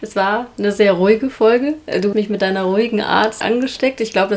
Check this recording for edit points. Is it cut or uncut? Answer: cut